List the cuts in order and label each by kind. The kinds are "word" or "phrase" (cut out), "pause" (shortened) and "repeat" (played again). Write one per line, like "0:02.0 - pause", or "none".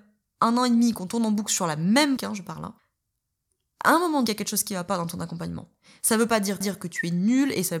0:02.2 - word
0:04.3 - phrase
0:06.6 - repeat